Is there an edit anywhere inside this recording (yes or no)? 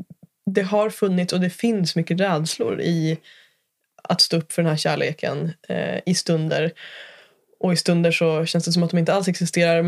no